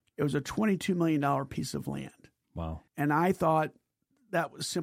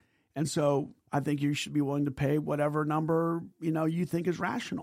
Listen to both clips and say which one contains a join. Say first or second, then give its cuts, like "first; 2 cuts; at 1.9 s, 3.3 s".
first; 2 cuts; at 2.9 s, 3.9 s